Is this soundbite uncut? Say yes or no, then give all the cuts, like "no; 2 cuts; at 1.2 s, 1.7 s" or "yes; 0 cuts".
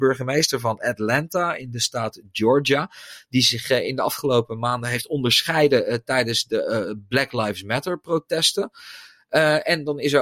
yes; 0 cuts